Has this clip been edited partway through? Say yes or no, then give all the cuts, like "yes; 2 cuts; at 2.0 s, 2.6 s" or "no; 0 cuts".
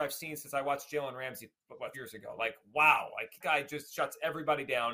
yes; 3 cuts; at 1.6 s, 1.9 s, 3.4 s